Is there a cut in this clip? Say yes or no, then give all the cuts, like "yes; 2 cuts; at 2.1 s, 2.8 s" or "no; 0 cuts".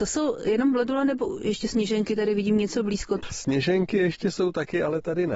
no; 0 cuts